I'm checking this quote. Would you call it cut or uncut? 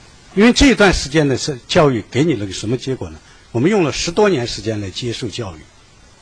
uncut